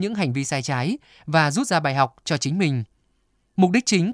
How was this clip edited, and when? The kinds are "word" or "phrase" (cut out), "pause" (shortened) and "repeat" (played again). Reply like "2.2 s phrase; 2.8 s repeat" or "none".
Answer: none